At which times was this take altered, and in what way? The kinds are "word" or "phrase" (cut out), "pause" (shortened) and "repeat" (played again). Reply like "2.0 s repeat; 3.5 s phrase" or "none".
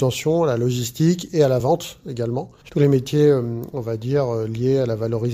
none